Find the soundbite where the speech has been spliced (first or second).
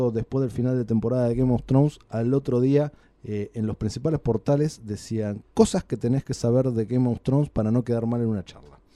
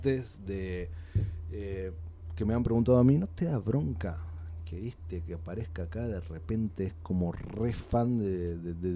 first